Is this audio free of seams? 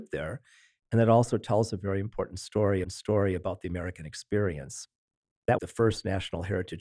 no; 2 cuts; at 2.8 s, 5.6 s

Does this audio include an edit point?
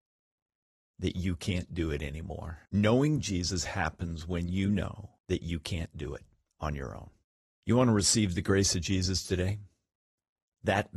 yes; 3 cuts; at 2.7 s, 5.2 s, 7.2 s

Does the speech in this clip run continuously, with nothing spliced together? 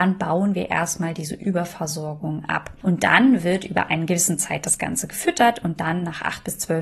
yes; 0 cuts

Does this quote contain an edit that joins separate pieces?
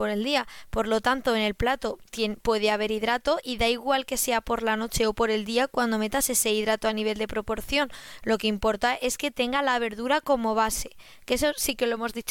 no; 0 cuts

